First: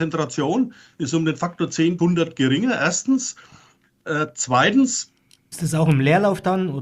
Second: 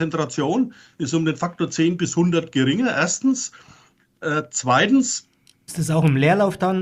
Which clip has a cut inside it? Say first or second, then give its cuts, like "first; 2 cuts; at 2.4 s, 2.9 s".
first; 1 cut; at 2.0 s